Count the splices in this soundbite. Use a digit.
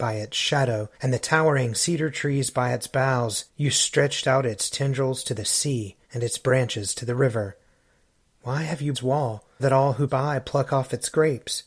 6